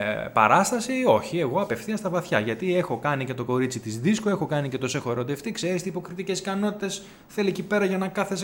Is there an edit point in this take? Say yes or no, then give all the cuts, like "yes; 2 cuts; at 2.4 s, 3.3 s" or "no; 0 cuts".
no; 0 cuts